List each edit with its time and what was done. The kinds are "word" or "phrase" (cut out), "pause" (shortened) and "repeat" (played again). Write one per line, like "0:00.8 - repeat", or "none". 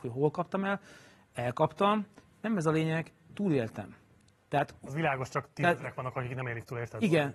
none